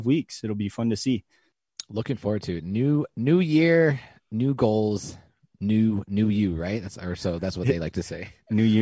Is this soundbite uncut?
yes; 0 cuts

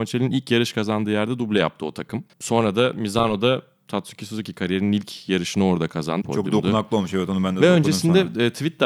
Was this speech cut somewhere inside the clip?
yes; 2 cuts; at 2.3 s, 6.2 s

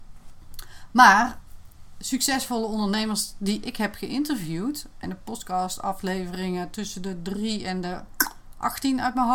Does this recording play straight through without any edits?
no; 1 cut; at 5.0 s

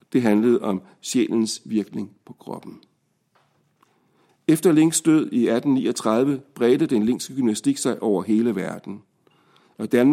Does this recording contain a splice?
no; 0 cuts

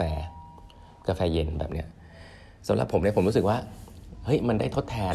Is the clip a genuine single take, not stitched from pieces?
no; 1 cut; at 2.6 s

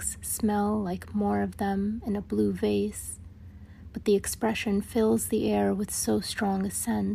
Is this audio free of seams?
yes; 0 cuts

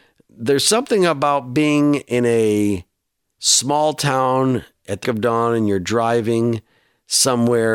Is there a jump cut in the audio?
yes; 1 cut; at 5.0 s

